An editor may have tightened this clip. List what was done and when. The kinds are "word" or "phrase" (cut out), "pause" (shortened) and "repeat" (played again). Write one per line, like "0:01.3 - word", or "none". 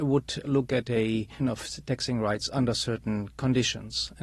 0:01.4 - word